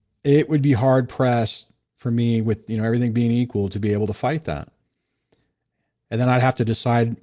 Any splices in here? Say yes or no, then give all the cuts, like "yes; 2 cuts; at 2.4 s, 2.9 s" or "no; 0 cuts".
no; 0 cuts